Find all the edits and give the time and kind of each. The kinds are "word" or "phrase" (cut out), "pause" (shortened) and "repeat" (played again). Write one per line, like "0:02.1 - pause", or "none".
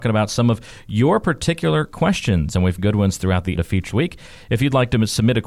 0:02.8 - phrase
0:03.6 - word
0:03.9 - word

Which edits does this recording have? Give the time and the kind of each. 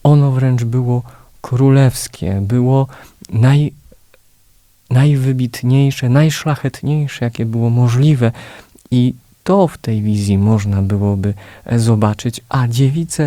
none

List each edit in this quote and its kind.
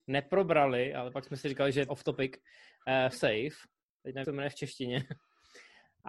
0:01.9 - word
0:03.1 - word
0:04.2 - word

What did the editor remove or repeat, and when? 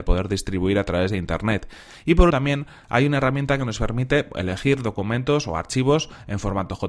0:02.3 - word

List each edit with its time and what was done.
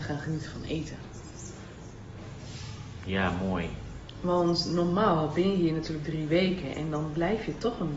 none

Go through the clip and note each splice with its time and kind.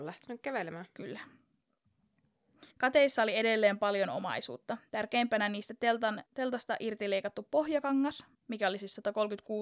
0:02.7 - pause
0:06.3 - pause
0:08.3 - pause

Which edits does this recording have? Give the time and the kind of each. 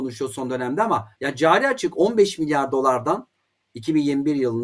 0:01.1 - pause

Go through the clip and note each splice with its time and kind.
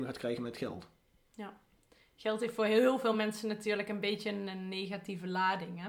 none

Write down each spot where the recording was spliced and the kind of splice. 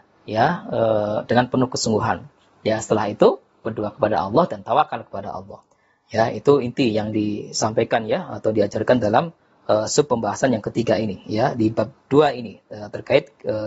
none

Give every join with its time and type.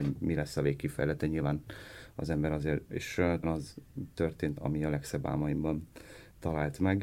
0:02.9 - phrase
0:03.4 - word
0:04.6 - word

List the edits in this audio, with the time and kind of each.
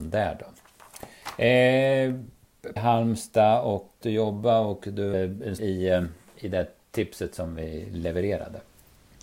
0:02.8 - phrase
0:04.0 - phrase
0:05.1 - word
0:05.6 - phrase

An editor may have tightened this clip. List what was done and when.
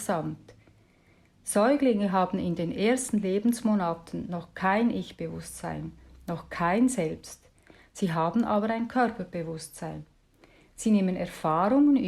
none

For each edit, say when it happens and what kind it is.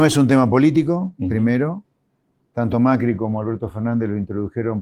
none

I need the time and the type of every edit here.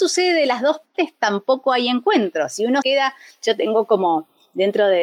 0:02.8 - word

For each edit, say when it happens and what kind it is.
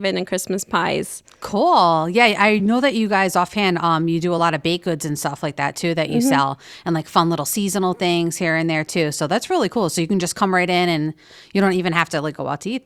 none

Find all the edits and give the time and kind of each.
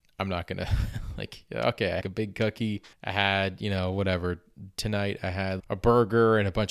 0:02.0 - phrase
0:02.9 - pause
0:05.6 - word

